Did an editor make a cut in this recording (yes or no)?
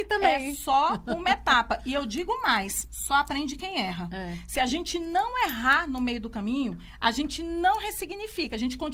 no